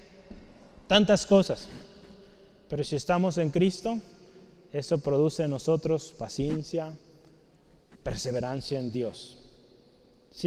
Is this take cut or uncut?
uncut